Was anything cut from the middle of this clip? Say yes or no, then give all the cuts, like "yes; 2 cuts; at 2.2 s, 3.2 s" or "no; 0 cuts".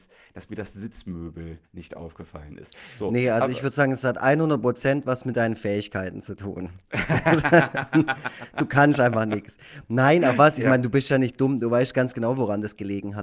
yes; 1 cut; at 1.7 s